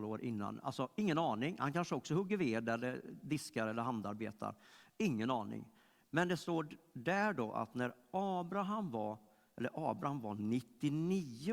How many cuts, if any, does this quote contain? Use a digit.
0